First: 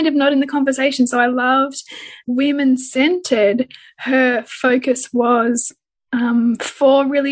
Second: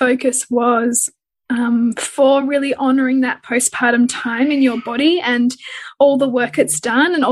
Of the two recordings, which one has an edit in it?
first; 1 cut; at 2.2 s

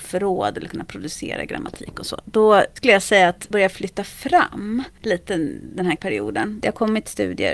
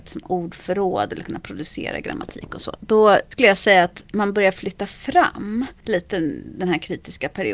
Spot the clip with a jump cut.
first; 2 cuts; at 3.5 s, 6.0 s

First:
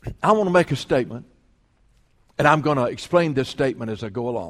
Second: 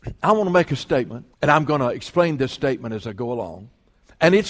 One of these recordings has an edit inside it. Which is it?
second; 1 cut; at 1.3 s

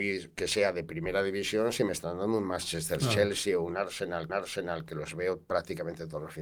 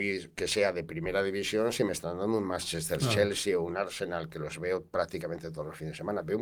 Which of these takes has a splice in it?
first; 1 cut; at 4.3 s

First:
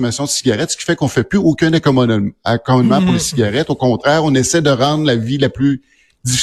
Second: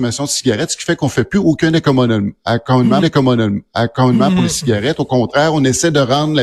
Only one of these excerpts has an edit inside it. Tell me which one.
second; 1 cut; at 3.0 s

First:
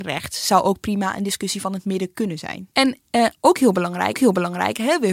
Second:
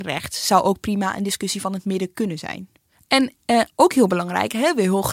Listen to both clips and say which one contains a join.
first; 2 cuts; at 2.7 s, 4.1 s

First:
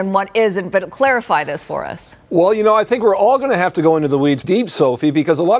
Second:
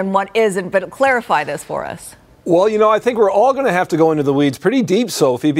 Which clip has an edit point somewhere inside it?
first; 2 cuts; at 2.2 s, 4.4 s

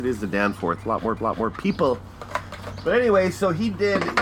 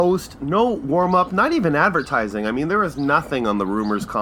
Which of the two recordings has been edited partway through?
first; 1 cut; at 1.2 s

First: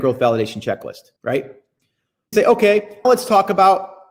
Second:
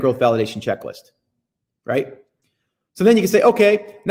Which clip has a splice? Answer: first; 3 cuts; at 1.2 s, 2.3 s, 3.0 s

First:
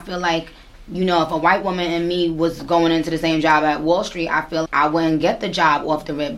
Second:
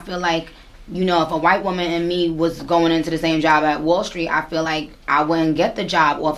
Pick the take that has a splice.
first; 1 cut; at 4.7 s

